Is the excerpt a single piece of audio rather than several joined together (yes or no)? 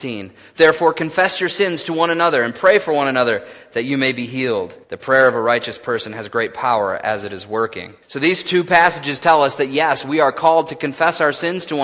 no